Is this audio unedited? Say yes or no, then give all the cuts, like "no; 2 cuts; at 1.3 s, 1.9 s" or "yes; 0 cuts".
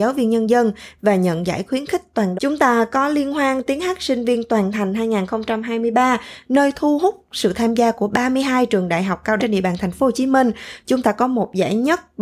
no; 2 cuts; at 2.3 s, 9.4 s